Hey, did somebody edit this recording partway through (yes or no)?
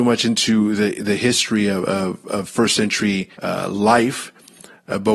yes